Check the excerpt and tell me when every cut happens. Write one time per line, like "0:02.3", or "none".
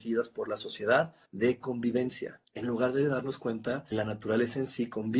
0:01.2
0:02.4
0:03.9

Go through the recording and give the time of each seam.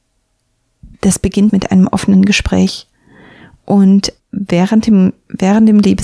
0:00.9
0:01.5
0:04.2

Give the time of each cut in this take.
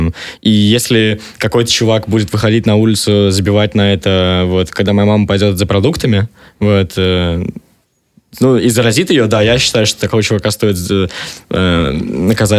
none

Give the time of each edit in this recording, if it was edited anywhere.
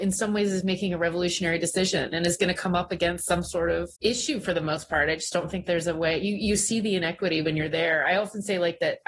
0:04.0

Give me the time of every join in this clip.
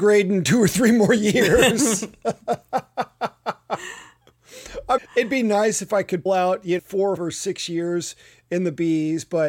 0:05.0
0:06.3
0:06.8
0:07.2

